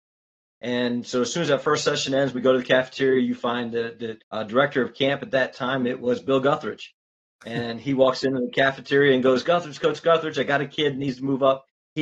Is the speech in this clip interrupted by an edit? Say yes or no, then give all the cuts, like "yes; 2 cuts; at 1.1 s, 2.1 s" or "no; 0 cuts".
yes; 2 cuts; at 4.2 s, 9.4 s